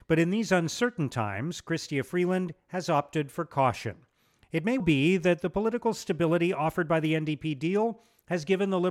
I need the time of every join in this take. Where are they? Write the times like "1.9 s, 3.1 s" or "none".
4.8 s

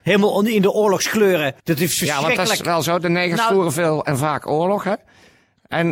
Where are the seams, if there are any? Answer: 1.6 s

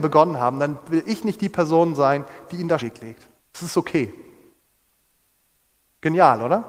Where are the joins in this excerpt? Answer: 2.8 s, 3.4 s

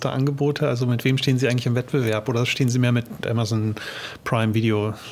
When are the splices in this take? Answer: 3.2 s

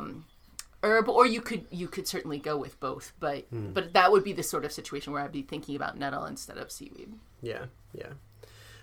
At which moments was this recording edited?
none

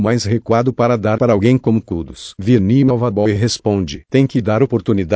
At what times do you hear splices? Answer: 1.2 s

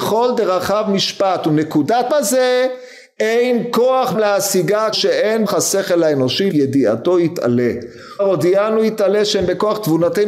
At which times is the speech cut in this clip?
2.1 s, 4.1 s, 4.9 s, 5.5 s, 6.5 s, 8.2 s

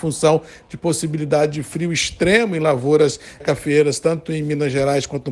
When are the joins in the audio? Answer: 3.4 s

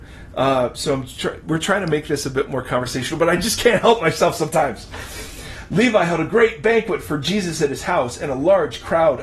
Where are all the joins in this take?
none

